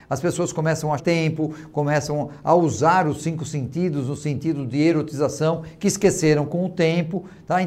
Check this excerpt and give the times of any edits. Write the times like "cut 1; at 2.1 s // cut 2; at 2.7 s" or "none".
cut 1; at 1.0 s